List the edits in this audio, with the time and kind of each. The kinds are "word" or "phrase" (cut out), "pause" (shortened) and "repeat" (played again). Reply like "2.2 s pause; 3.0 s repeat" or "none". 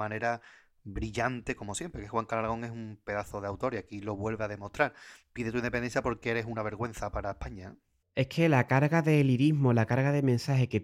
none